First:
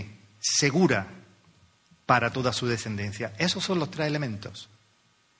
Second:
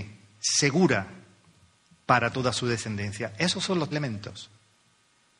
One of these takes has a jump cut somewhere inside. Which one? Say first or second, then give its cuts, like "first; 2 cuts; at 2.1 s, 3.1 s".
second; 1 cut; at 3.9 s